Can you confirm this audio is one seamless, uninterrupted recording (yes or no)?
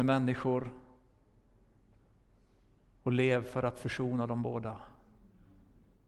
yes